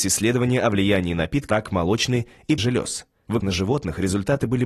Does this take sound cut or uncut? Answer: cut